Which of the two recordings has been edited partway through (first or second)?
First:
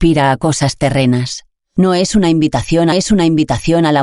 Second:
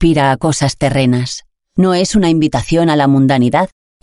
first